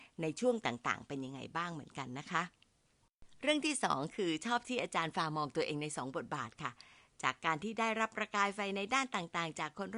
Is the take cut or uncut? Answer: uncut